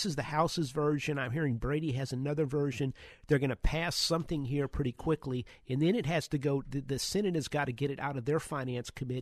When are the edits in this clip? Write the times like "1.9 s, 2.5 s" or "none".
none